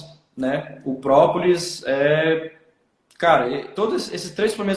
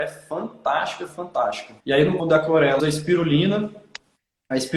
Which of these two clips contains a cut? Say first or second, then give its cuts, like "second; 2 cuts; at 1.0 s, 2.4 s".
second; 4 cuts; at 1.1 s, 1.8 s, 2.2 s, 2.8 s